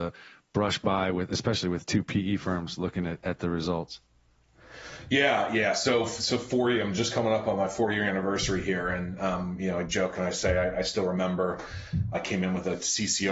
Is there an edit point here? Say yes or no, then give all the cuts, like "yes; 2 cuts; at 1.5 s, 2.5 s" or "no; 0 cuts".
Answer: no; 0 cuts